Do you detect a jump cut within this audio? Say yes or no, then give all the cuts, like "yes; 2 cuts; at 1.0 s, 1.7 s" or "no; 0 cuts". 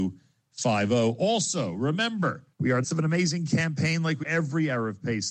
yes; 3 cuts; at 2.5 s, 2.8 s, 4.2 s